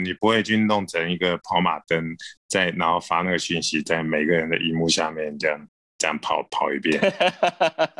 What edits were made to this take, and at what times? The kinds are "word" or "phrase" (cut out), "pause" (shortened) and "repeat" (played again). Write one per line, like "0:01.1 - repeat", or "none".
none